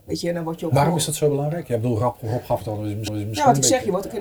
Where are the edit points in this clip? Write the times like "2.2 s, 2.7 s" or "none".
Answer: 3.1 s